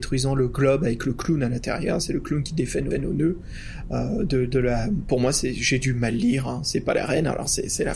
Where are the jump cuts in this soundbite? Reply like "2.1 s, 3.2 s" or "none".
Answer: 2.9 s